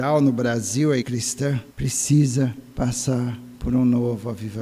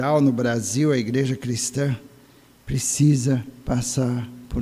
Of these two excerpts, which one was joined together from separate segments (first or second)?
first